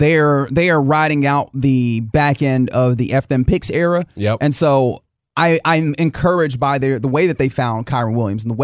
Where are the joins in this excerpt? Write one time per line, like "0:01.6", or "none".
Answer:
none